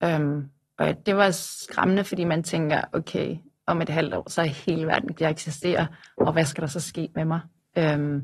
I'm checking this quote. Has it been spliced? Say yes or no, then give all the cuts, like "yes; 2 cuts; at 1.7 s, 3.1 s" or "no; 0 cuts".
yes; 1 cut; at 5.1 s